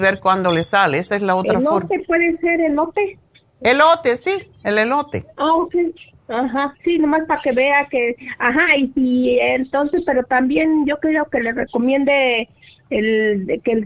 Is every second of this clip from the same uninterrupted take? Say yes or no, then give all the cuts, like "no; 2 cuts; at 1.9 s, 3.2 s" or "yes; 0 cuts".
no; 2 cuts; at 3.3 s, 6.8 s